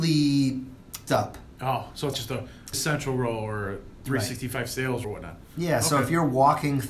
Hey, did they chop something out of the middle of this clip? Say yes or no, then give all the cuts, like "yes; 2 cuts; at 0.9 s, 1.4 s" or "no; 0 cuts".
yes; 4 cuts; at 1.1 s, 2.1 s, 2.7 s, 5.0 s